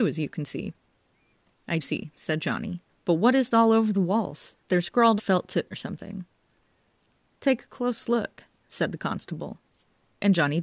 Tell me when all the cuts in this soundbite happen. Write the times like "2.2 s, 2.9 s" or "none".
1.8 s, 2.9 s, 3.5 s, 4.6 s, 5.2 s, 5.7 s